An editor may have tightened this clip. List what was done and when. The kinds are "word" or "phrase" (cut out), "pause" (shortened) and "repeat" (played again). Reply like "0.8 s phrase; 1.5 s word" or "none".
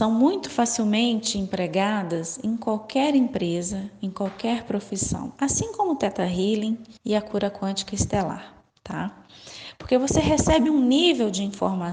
7.0 s pause; 8.7 s pause